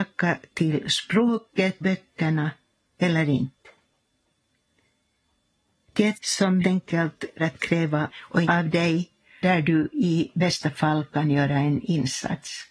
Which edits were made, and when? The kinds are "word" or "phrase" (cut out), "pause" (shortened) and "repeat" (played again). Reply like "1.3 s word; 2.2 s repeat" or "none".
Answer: 1.8 s word; 6.1 s word; 6.6 s word; 7.4 s word; 8.1 s word; 8.4 s word; 9.4 s word